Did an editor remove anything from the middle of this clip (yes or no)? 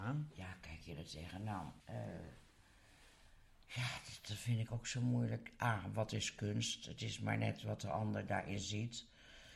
yes